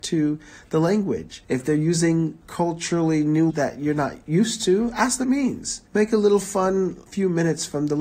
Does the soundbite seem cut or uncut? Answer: cut